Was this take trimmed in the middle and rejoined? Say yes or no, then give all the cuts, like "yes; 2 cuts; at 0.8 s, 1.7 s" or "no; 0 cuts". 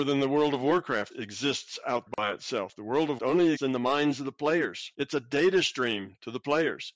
yes; 5 cuts; at 1.1 s, 2.1 s, 3.2 s, 3.6 s, 4.9 s